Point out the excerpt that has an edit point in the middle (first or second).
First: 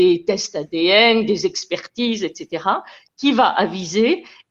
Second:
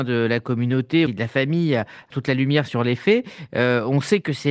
second